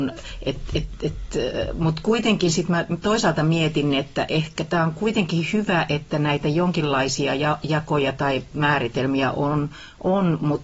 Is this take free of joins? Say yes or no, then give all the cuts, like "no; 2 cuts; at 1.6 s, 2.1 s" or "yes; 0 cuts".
yes; 0 cuts